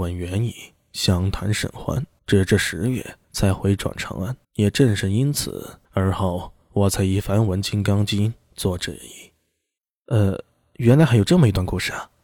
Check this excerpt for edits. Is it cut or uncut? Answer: cut